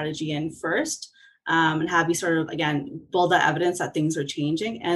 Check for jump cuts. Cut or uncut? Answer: uncut